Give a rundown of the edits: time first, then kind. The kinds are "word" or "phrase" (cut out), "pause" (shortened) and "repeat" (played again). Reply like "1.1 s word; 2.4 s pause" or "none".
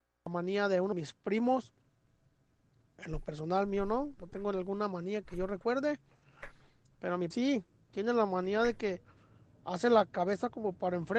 0.9 s word; 5.2 s word; 7.3 s word